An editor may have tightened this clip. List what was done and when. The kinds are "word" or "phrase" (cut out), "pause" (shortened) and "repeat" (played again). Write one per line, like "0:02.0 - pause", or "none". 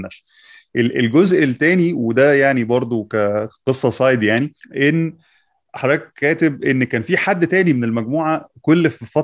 0:04.6 - pause